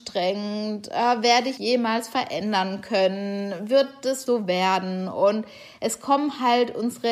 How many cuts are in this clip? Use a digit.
2